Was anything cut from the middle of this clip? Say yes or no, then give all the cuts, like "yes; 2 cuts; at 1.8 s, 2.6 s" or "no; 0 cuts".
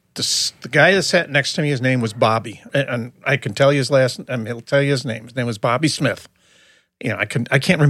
yes; 1 cut; at 2.7 s